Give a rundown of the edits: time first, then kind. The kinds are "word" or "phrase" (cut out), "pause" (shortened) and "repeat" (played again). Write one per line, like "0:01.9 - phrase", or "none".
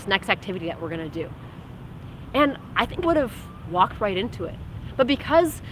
0:03.0 - word
0:03.6 - word